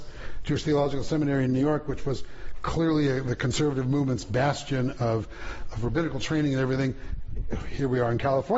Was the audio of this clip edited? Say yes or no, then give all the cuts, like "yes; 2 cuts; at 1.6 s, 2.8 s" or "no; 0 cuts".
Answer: no; 0 cuts